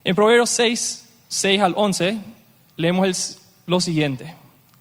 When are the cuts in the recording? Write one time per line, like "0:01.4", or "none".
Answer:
none